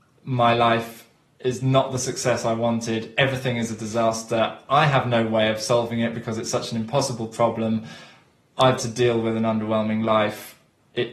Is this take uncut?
no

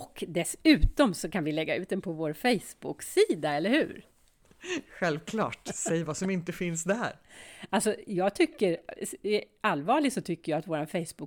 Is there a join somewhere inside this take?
no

